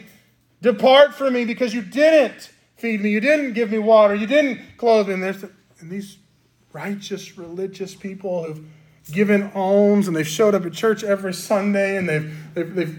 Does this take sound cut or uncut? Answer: uncut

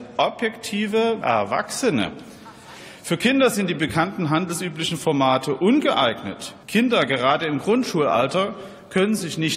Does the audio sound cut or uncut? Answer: cut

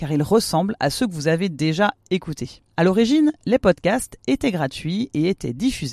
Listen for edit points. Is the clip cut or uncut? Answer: cut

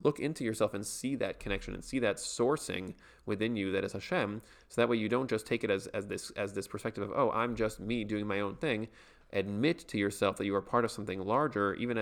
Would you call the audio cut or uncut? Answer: uncut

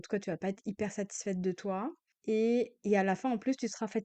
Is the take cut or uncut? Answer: uncut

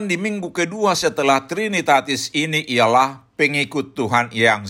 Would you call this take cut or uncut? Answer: uncut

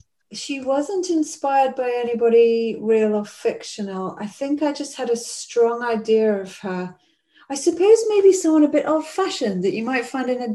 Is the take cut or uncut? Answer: uncut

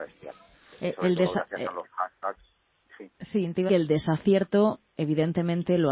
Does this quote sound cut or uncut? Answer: cut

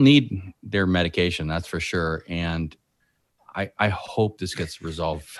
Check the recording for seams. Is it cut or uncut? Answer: uncut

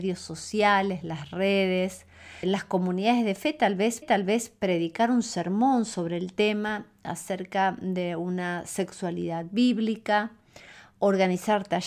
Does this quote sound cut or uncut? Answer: cut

